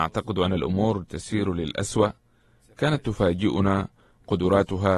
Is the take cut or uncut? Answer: uncut